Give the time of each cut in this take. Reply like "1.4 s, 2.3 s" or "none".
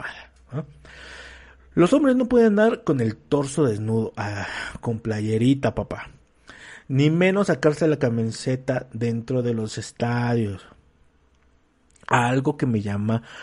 none